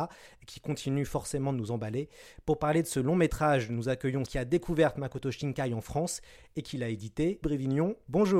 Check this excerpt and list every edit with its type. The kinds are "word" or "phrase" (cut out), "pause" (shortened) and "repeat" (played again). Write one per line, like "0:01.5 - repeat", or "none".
0:04.2 - word
0:07.4 - word